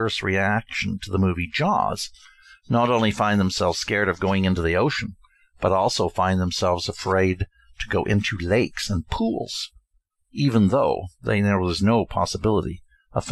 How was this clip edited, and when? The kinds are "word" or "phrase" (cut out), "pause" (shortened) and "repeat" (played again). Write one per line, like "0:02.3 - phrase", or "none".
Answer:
none